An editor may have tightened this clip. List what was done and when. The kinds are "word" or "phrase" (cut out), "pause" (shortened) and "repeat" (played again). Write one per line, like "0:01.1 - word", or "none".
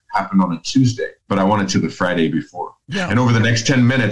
0:01.2 - pause
0:01.7 - phrase
0:02.8 - pause